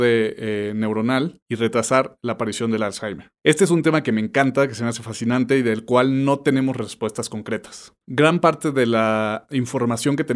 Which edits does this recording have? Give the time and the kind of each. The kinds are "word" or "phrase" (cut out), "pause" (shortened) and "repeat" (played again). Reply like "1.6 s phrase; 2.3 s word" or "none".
3.4 s pause; 8.0 s pause